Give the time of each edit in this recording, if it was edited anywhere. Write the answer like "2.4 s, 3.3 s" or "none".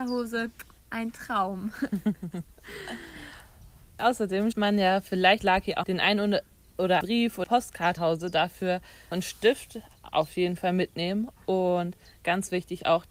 4.0 s, 4.5 s, 5.4 s, 5.8 s, 7.0 s, 7.4 s, 8.0 s, 9.1 s